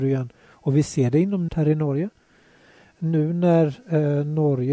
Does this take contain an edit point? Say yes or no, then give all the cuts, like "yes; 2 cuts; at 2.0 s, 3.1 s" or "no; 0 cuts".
yes; 1 cut; at 1.5 s